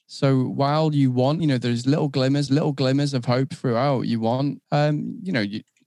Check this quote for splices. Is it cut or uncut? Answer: cut